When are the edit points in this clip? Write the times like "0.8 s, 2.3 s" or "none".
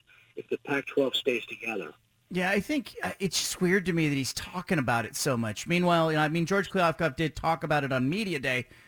2.2 s